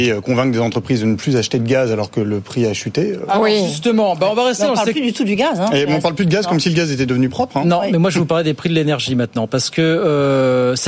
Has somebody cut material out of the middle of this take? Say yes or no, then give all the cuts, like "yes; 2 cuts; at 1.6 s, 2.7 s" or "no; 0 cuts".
no; 0 cuts